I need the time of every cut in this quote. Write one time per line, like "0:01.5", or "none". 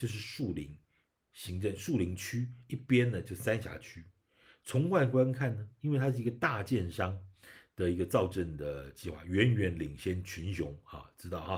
none